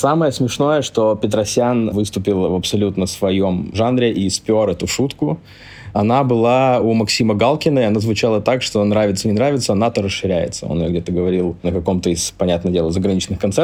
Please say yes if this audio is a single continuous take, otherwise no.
yes